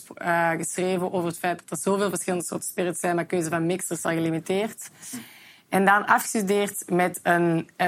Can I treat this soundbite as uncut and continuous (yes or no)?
no